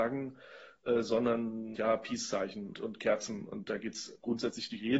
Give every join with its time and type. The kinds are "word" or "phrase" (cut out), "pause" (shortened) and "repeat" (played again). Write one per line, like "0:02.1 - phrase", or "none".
0:01.8 - word
0:02.7 - word